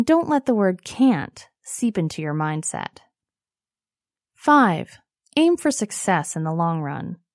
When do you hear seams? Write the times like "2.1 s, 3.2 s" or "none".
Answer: none